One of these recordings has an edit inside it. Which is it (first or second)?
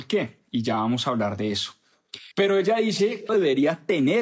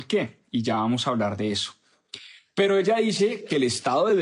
first